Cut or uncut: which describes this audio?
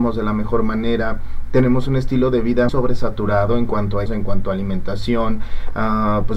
cut